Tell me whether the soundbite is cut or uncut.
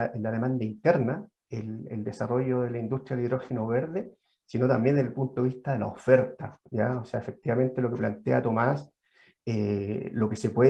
uncut